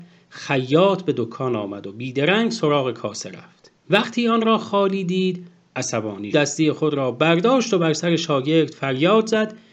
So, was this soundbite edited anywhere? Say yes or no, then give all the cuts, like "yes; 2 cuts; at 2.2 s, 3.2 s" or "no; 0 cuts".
yes; 2 cuts; at 3.8 s, 6.3 s